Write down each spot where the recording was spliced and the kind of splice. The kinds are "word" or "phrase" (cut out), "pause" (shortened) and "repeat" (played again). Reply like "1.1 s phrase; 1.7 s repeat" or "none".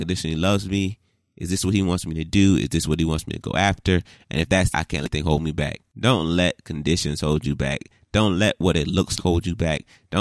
4.7 s phrase; 9.2 s word